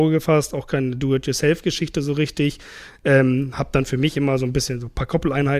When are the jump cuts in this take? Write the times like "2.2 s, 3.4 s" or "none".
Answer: none